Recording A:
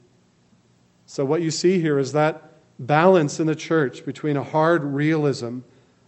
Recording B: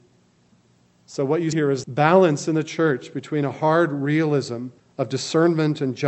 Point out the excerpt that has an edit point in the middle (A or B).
B